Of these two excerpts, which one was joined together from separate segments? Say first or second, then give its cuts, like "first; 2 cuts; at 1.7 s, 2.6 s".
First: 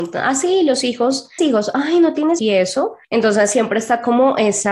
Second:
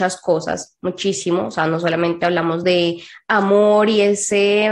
first; 3 cuts; at 1.4 s, 2.4 s, 3.0 s